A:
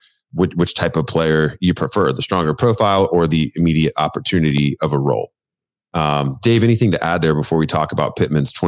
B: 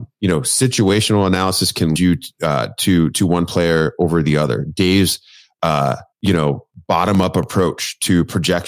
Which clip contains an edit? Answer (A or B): B